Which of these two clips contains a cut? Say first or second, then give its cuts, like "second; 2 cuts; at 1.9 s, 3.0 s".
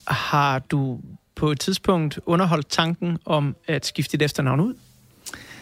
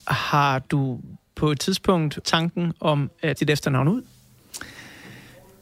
second; 2 cuts; at 2.2 s, 3.4 s